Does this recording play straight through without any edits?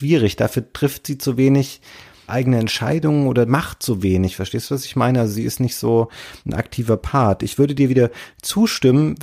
yes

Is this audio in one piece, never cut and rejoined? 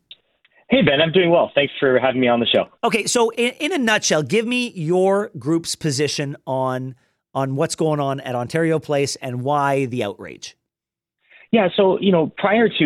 yes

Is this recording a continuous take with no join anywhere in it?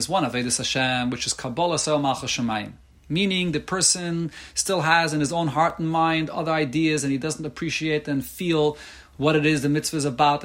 yes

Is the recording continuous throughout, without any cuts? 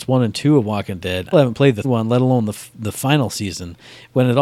no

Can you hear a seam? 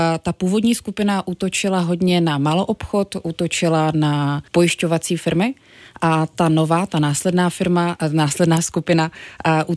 yes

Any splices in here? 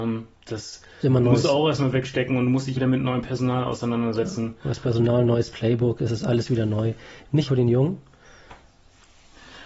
yes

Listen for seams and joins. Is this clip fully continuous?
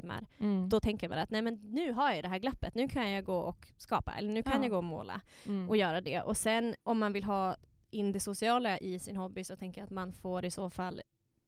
no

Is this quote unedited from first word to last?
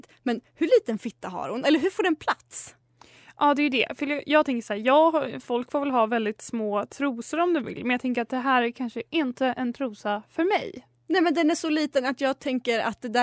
yes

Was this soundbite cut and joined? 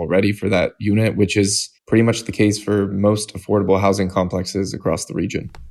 yes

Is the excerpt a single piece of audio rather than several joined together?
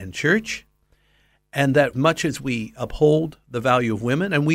no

